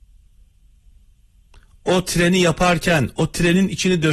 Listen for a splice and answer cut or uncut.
uncut